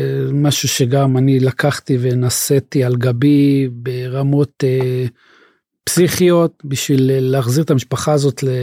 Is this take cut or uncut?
uncut